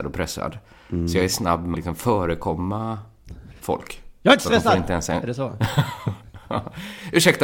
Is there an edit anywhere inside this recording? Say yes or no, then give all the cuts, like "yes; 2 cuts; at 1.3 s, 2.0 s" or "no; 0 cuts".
yes; 1 cut; at 1.7 s